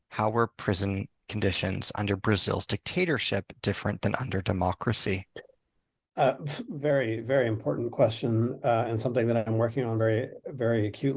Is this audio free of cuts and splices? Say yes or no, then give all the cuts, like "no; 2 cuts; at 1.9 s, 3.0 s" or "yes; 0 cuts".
yes; 0 cuts